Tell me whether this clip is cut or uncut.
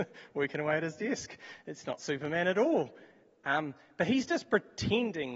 uncut